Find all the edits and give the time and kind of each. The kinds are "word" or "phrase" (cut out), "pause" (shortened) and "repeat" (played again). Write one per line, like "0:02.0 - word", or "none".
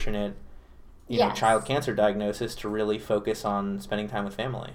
none